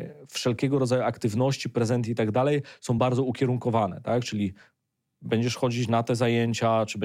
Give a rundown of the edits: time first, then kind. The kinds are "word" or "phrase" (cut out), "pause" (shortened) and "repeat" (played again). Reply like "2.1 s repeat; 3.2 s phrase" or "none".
none